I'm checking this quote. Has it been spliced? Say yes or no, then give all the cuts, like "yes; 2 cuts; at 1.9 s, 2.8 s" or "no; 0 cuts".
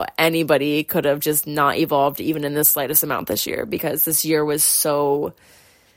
no; 0 cuts